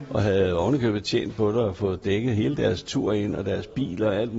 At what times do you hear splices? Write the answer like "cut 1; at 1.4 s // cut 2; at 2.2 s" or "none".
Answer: none